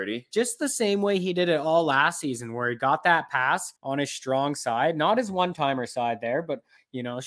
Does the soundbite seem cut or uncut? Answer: cut